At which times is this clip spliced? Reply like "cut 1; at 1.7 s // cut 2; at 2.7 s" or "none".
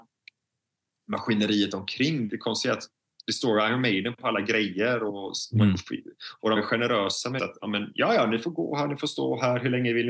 cut 1; at 2.3 s // cut 2; at 6.6 s // cut 3; at 7.4 s